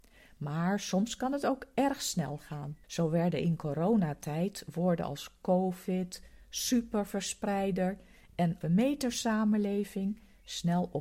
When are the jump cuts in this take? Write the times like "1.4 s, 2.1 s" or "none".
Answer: 2.8 s, 8.6 s